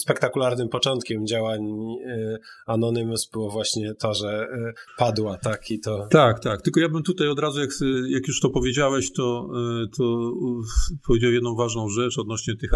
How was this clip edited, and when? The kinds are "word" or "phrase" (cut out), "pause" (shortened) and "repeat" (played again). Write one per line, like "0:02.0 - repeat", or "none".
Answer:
0:04.9 - phrase